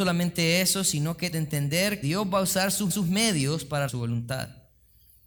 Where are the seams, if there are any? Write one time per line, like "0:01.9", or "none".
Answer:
0:01.3
0:02.0
0:02.9
0:03.9